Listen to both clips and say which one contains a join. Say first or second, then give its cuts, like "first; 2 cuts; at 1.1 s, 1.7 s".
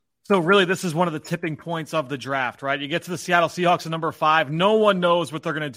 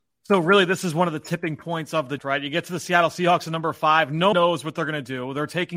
second; 2 cuts; at 2.2 s, 4.3 s